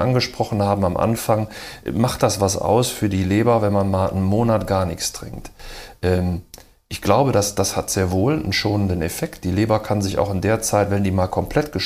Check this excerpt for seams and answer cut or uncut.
uncut